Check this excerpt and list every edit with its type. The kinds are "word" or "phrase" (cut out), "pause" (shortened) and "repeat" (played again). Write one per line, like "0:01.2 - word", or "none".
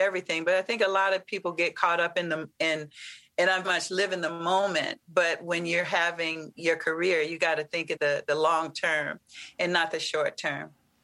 0:03.6 - word
0:08.0 - word